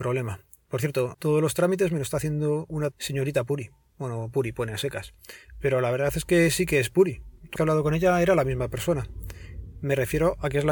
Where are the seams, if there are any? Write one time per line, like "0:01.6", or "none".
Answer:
0:01.1
0:02.9
0:07.6